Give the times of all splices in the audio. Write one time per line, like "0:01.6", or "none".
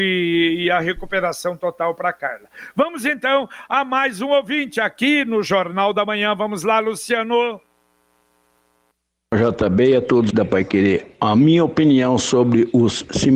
0:10.3